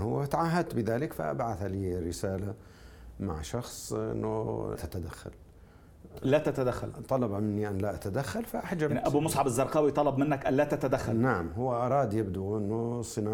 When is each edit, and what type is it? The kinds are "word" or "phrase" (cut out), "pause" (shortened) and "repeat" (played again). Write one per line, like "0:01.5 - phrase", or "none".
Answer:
0:04.8 - word